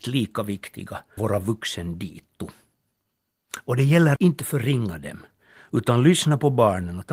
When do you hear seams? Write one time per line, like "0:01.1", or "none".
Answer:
0:01.2
0:04.2